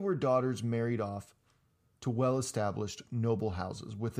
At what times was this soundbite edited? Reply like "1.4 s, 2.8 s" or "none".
none